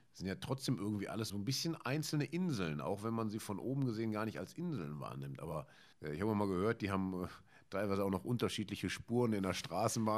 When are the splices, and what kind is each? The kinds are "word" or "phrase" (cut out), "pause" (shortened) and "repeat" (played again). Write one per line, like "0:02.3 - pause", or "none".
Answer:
0:01.3 - word
0:05.9 - pause